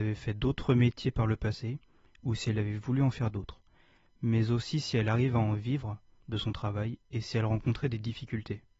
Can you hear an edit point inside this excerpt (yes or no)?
no